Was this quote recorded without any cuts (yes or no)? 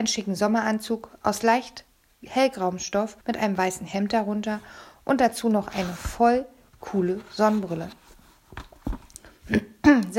no